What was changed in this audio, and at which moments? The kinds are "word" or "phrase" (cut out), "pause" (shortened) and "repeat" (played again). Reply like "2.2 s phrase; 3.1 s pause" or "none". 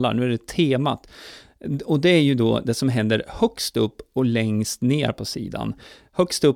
none